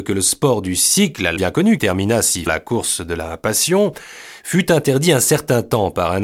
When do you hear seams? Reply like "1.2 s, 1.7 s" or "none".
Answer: 1.4 s, 1.8 s, 2.5 s